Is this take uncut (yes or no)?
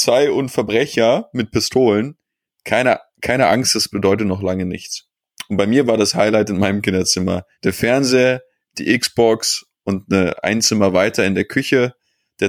no